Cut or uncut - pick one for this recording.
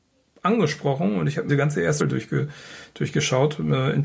cut